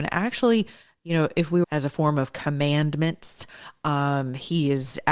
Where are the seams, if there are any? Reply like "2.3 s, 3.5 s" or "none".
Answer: 1.6 s